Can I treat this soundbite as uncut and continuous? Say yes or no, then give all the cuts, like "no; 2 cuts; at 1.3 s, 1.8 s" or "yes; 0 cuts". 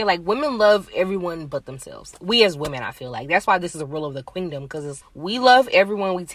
no; 1 cut; at 5.0 s